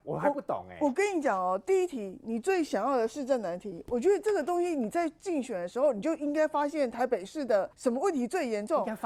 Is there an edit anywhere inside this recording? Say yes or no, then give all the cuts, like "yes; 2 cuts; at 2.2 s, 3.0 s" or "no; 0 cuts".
yes; 1 cut; at 7.7 s